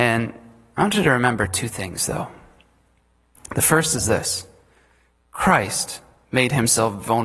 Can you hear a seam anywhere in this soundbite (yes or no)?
no